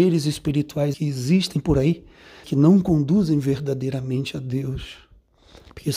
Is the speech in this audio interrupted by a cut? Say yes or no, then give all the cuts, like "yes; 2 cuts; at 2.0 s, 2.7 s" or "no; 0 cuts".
yes; 2 cuts; at 0.9 s, 2.4 s